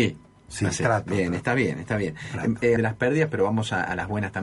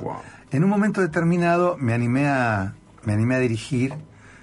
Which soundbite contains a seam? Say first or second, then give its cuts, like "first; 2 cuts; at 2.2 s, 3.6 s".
first; 1 cut; at 2.8 s